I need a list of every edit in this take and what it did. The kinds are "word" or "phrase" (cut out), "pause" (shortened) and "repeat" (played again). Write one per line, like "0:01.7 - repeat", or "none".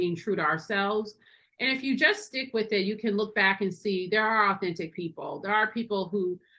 none